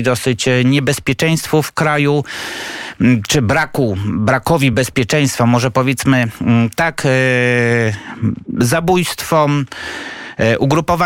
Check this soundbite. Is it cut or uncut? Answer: uncut